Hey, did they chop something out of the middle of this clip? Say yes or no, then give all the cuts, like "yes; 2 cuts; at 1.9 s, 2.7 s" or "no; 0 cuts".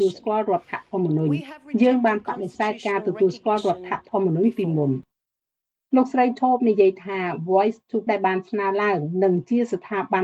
yes; 1 cut; at 8.1 s